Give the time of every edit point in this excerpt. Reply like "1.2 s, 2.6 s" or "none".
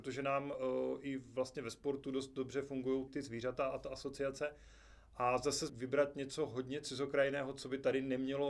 3.1 s, 5.7 s